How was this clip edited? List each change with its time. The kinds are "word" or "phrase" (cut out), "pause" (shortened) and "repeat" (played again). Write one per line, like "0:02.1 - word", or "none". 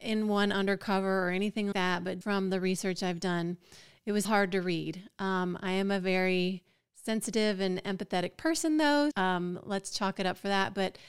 0:01.7 - word
0:02.2 - word
0:04.2 - word
0:09.1 - word